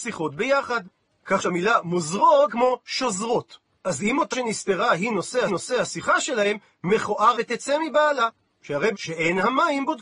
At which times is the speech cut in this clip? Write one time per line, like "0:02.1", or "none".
0:01.4
0:02.5
0:03.8
0:04.3
0:05.5
0:07.3
0:08.9